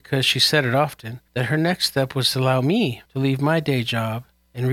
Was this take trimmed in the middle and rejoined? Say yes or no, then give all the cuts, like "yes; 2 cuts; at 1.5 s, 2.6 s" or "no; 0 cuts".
yes; 2 cuts; at 1.3 s, 3.1 s